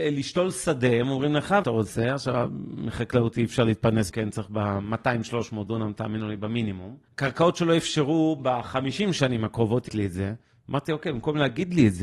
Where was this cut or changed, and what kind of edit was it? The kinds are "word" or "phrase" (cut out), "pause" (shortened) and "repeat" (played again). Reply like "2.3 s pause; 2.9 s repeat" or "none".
1.6 s phrase; 4.1 s word; 7.1 s pause; 9.9 s word